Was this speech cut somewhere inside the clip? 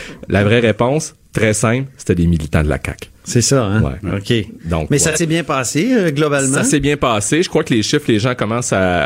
no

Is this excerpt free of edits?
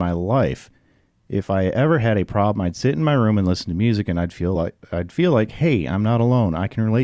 yes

